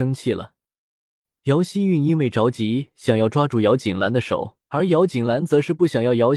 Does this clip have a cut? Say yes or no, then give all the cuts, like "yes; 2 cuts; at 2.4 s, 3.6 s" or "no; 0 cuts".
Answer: yes; 1 cut; at 4.6 s